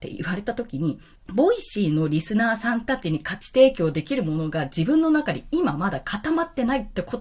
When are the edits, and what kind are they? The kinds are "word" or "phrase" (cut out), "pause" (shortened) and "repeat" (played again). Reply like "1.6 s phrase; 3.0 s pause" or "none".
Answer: 1.1 s pause